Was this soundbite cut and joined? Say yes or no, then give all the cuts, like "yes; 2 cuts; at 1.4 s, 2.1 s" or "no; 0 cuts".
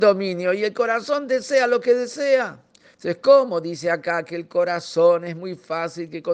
no; 0 cuts